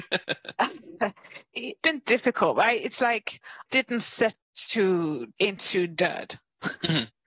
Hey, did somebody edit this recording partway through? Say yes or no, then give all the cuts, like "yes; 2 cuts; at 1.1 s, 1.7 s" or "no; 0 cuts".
yes; 4 cuts; at 1.8 s, 3.7 s, 4.3 s, 5.3 s